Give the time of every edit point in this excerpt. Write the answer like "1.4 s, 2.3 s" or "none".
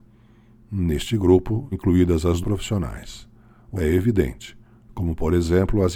1.7 s, 2.4 s, 3.8 s